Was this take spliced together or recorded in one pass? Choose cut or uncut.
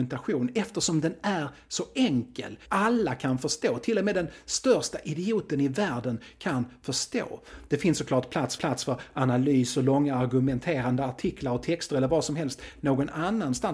cut